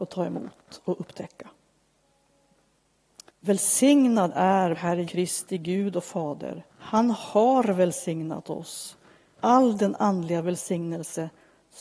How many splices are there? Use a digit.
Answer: 5